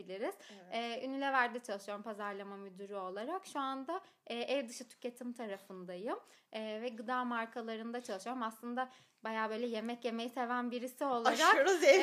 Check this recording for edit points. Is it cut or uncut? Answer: uncut